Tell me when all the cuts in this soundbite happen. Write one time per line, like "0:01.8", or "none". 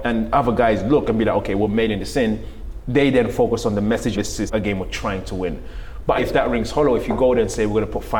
0:04.1
0:04.5
0:06.2